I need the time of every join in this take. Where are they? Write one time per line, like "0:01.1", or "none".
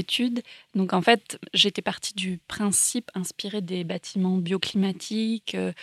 none